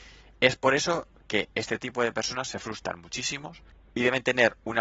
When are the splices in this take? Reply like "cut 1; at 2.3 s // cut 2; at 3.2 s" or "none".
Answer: none